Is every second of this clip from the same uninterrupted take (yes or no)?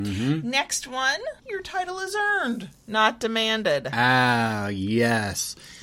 no